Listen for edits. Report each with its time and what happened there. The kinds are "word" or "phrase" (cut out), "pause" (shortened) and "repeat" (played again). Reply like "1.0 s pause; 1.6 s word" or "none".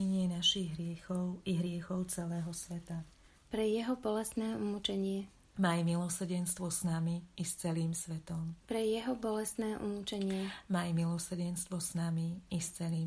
none